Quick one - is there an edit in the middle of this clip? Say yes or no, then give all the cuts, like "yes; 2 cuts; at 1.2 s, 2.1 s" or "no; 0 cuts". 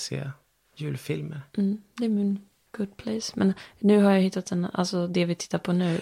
no; 0 cuts